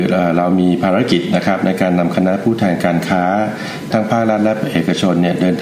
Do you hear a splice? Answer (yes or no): yes